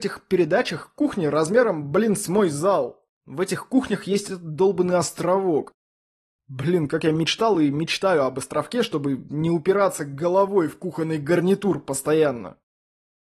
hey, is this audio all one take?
yes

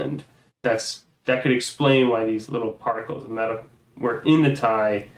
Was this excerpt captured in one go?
yes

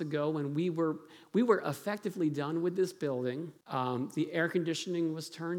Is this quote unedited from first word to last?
no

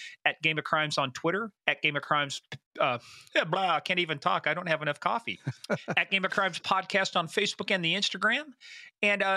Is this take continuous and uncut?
no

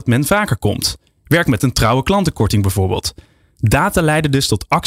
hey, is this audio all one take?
yes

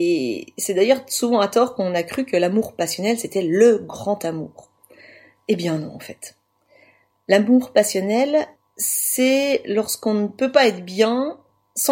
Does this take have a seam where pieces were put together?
no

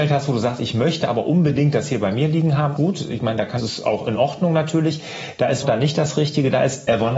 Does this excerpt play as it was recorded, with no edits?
no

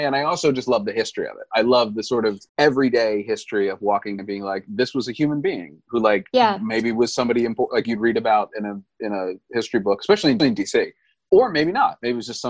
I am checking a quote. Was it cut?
yes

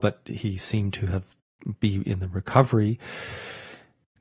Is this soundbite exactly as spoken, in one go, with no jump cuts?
yes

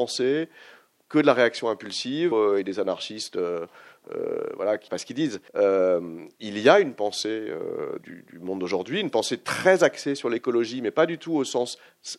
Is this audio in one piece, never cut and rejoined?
no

